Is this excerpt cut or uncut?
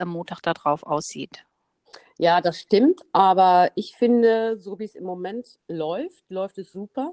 cut